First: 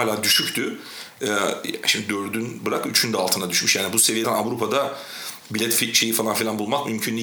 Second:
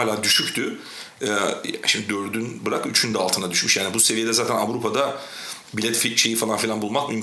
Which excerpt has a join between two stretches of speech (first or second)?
first